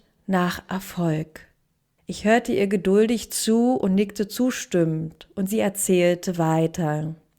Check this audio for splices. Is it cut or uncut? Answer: cut